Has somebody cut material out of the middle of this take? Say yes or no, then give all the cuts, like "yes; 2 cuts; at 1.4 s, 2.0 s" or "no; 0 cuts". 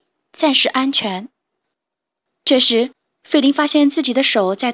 no; 0 cuts